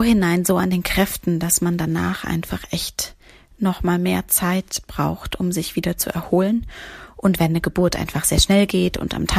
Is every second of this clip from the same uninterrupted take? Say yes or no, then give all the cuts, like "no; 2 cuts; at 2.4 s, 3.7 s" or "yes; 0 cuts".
yes; 0 cuts